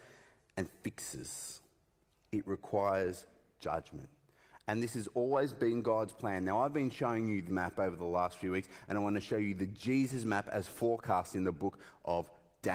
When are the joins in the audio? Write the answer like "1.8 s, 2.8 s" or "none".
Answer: 7.5 s